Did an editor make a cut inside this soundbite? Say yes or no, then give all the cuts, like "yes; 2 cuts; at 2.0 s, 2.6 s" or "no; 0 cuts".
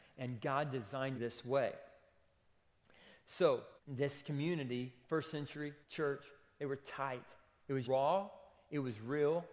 yes; 5 cuts; at 1.1 s, 3.8 s, 5.0 s, 5.8 s, 7.8 s